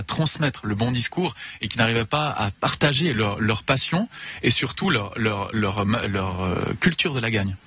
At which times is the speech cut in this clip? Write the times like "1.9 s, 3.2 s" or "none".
none